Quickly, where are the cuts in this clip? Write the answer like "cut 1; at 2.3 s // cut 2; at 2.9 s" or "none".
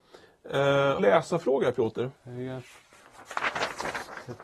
cut 1; at 1.0 s // cut 2; at 2.2 s